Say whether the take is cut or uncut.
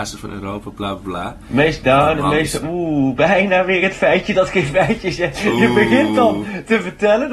uncut